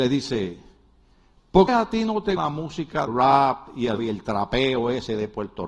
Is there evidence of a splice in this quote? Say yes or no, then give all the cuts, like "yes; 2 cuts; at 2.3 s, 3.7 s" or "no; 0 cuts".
yes; 4 cuts; at 1.7 s, 2.4 s, 3.1 s, 4.0 s